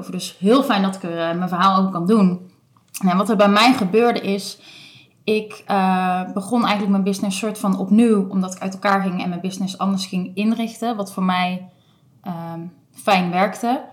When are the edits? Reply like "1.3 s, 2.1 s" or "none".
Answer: none